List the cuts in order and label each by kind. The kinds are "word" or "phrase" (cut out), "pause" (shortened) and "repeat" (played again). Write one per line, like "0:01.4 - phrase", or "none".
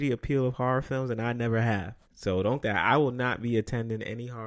0:02.0 - pause
0:02.6 - phrase